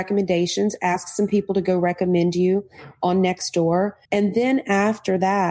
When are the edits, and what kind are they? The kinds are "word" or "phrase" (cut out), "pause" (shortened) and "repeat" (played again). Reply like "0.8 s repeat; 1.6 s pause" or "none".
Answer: 4.0 s pause